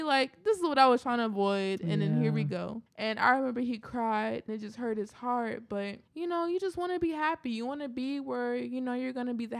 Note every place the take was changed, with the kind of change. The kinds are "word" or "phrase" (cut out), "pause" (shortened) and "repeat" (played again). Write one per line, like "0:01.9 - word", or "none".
0:02.9 - pause
0:04.5 - word
0:06.1 - pause